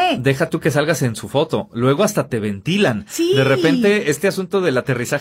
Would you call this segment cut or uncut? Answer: uncut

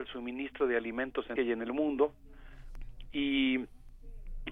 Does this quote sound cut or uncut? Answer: cut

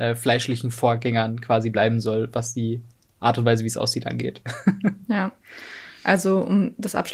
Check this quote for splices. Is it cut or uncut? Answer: uncut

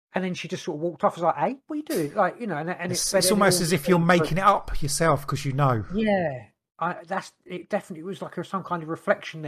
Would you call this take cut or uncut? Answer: uncut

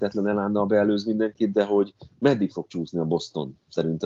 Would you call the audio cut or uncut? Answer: uncut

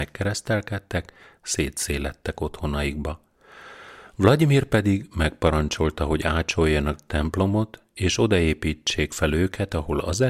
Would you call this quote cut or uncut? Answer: uncut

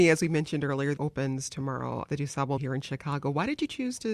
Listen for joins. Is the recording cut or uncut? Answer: cut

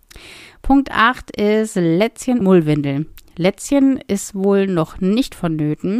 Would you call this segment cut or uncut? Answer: cut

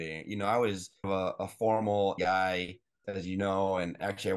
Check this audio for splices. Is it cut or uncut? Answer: cut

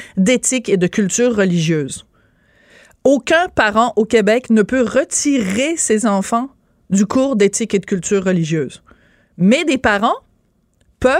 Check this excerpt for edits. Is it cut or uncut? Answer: uncut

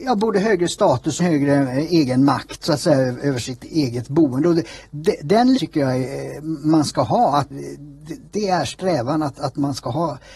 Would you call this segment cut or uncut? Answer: cut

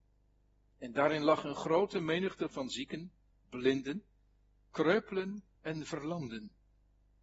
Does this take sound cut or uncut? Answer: cut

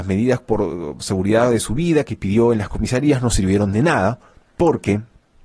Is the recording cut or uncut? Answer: cut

